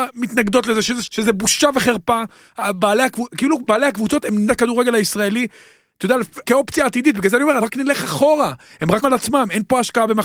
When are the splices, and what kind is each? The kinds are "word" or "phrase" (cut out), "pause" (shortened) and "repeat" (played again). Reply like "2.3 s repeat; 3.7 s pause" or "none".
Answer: 1.0 s word; 4.5 s word; 6.4 s word; 7.6 s word; 9.0 s word

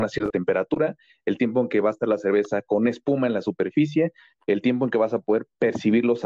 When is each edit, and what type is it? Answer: none

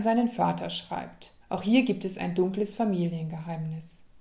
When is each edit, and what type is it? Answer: 1.4 s pause

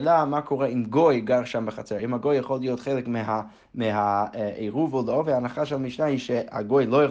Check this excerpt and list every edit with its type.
none

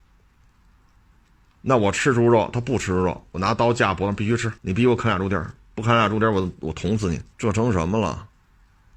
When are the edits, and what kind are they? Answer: 4.6 s pause; 7.3 s pause

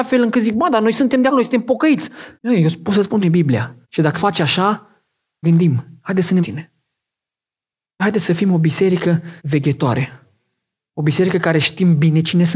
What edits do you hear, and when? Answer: 1.3 s word; 2.4 s pause; 3.2 s phrase; 3.8 s pause; 4.1 s word; 5.4 s phrase; 6.4 s phrase; 8.0 s word; 9.4 s pause

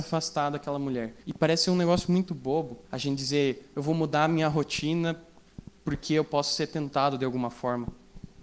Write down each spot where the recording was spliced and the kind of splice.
1.2 s pause; 2.8 s pause

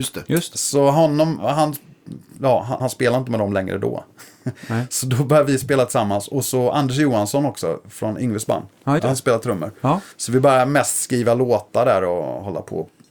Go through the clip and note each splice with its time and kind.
2.8 s phrase; 9.0 s word; 10.1 s pause

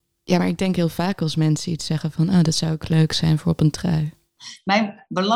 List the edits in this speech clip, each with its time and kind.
none

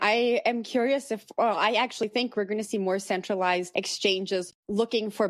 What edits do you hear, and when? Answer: none

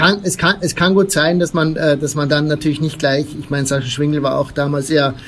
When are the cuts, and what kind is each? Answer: none

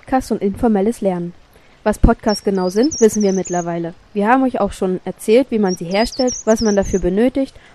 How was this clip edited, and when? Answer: none

